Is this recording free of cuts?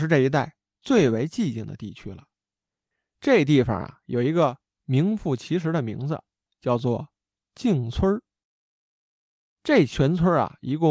yes; 0 cuts

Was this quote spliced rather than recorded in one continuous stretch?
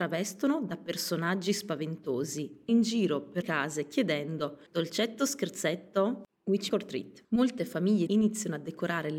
yes; 6 cuts; at 2.7 s, 3.4 s, 4.7 s, 6.7 s, 7.2 s, 8.1 s

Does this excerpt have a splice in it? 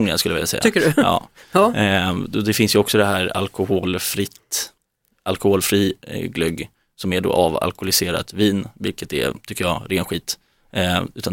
no; 0 cuts

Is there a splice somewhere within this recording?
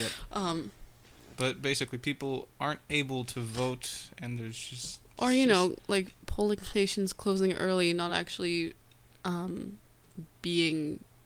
no; 0 cuts

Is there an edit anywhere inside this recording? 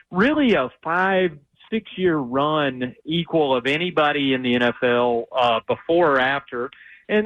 no; 0 cuts

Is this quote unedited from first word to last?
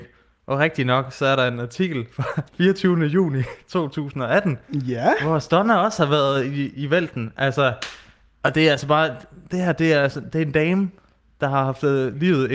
no; 1 cut; at 2.5 s

